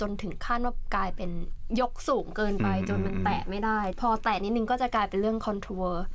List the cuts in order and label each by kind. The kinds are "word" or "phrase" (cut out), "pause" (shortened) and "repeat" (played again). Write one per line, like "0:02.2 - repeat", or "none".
0:03.9 - phrase